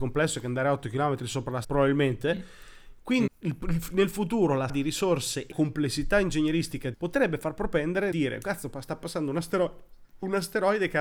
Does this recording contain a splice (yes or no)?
yes